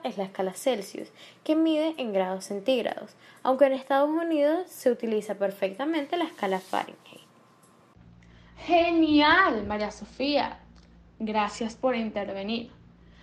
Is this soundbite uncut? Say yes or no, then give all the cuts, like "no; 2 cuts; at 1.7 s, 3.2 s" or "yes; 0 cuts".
yes; 0 cuts